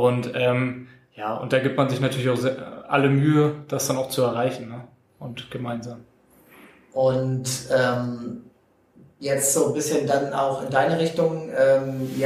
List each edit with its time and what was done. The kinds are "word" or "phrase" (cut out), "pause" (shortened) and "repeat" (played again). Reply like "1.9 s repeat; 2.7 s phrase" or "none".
none